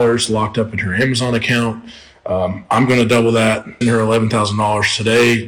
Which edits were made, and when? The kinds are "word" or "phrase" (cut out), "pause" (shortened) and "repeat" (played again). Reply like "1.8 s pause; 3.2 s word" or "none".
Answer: 3.8 s word